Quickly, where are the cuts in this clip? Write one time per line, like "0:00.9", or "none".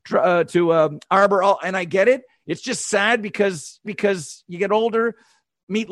0:03.9